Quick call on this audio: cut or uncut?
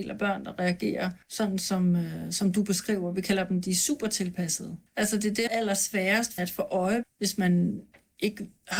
cut